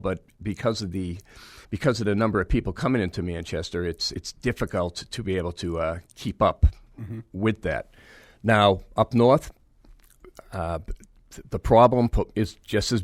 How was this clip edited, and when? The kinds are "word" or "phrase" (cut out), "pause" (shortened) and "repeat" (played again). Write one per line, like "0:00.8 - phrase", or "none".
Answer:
0:01.6 - pause
0:04.1 - word